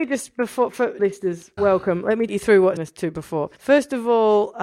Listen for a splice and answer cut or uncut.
cut